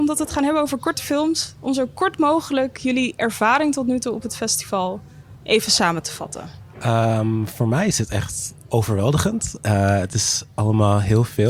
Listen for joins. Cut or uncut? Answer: uncut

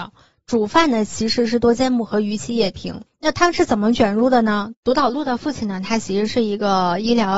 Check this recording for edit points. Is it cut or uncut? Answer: cut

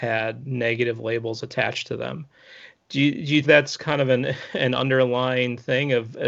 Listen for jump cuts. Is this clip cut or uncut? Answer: cut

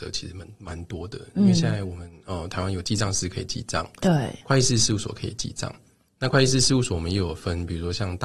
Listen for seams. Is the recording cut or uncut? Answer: uncut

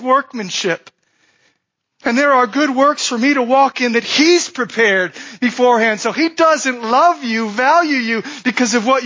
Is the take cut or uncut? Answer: uncut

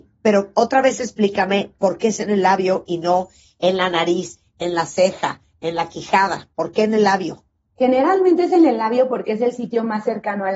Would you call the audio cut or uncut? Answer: uncut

